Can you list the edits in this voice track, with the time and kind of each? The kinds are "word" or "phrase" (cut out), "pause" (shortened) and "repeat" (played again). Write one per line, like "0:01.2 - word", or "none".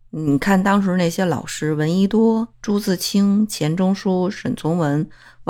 0:02.5 - pause